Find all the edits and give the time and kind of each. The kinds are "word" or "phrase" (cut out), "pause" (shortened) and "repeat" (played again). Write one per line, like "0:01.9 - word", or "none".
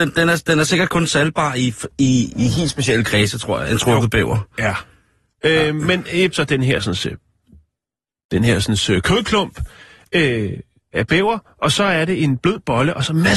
0:06.3 - phrase